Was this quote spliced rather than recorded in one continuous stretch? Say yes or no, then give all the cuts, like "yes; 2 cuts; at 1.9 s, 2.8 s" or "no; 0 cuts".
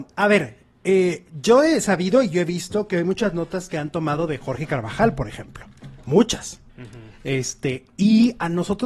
yes; 1 cut; at 6.7 s